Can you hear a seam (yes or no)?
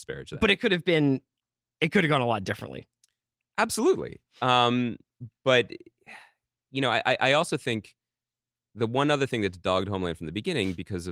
no